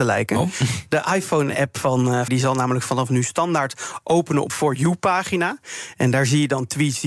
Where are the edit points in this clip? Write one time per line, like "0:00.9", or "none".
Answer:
0:02.3
0:04.5